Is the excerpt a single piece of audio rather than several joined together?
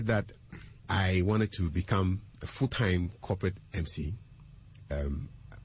yes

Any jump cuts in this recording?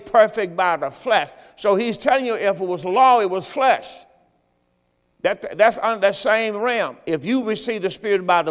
no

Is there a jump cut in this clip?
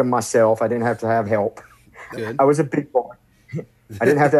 yes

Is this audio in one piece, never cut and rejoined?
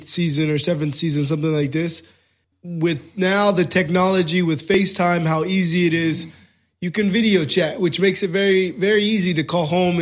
yes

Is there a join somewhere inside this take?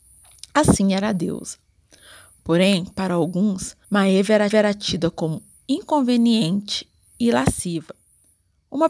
yes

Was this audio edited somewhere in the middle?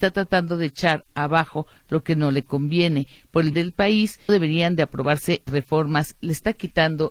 yes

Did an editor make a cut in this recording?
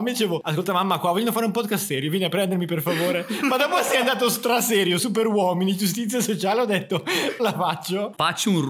yes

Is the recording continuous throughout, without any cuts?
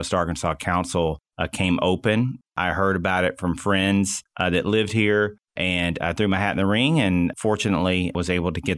yes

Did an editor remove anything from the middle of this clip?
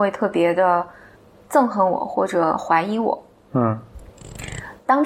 no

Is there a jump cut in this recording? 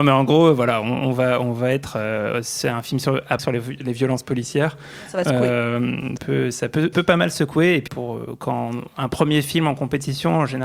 yes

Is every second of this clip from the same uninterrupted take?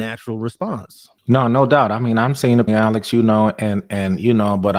no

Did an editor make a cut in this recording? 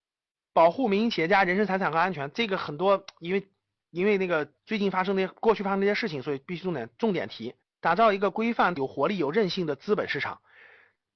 yes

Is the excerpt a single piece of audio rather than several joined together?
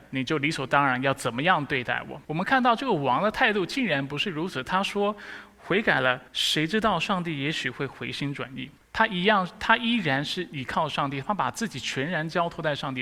no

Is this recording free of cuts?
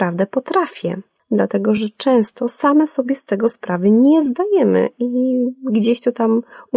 yes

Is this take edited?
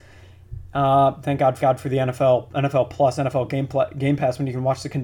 yes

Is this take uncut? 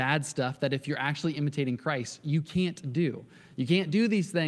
yes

